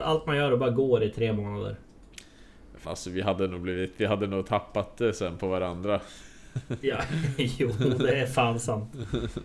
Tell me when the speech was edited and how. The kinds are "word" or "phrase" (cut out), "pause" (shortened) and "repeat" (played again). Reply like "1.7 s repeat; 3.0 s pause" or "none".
2.8 s word